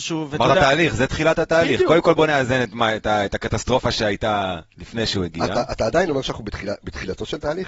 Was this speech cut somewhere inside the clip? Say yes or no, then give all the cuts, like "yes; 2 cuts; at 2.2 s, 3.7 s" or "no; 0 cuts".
no; 0 cuts